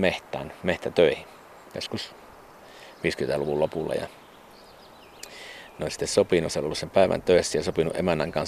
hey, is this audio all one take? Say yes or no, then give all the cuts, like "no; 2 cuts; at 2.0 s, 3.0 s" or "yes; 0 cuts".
no; 1 cut; at 6.5 s